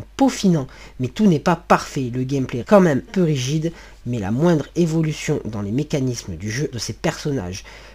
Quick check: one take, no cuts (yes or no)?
no